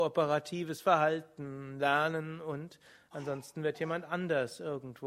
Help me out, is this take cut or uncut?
uncut